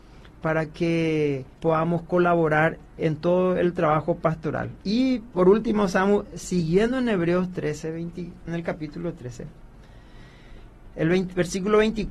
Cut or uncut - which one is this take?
cut